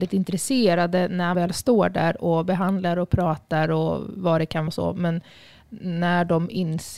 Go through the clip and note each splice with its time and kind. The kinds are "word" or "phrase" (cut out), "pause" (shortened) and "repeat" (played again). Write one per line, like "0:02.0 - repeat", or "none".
0:01.3 - word
0:04.7 - word